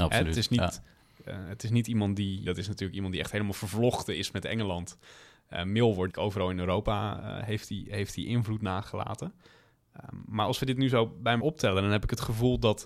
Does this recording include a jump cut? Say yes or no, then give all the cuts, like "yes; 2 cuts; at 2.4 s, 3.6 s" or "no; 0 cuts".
yes; 3 cuts; at 2.5 s, 6.1 s, 11.4 s